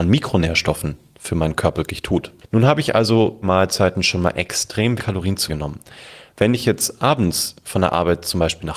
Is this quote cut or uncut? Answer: cut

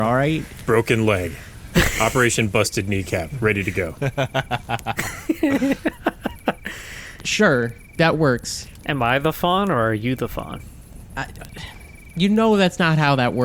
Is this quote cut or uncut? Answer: uncut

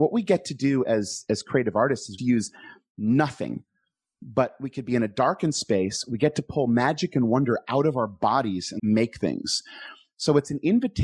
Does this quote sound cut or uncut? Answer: cut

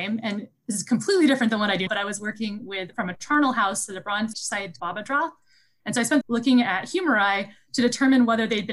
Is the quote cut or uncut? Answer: cut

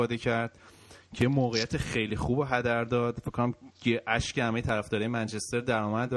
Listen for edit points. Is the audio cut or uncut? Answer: uncut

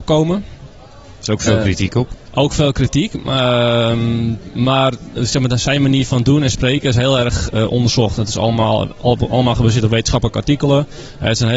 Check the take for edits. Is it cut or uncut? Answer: uncut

